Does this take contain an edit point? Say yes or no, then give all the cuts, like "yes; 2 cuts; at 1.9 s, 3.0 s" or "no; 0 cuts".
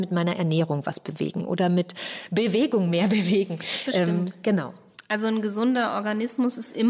no; 0 cuts